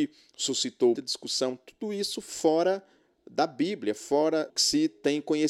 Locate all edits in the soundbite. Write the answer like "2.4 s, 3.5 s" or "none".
1.0 s, 4.5 s